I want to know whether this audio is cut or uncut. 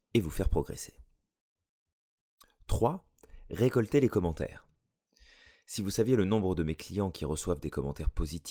uncut